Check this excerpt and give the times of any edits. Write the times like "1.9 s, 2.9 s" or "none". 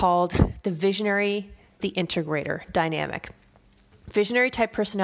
1.8 s